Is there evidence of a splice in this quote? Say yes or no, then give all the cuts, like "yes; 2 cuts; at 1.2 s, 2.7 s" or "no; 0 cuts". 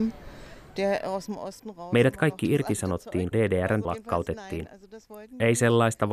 yes; 2 cuts; at 3.3 s, 3.8 s